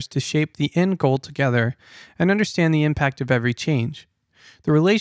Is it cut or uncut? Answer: uncut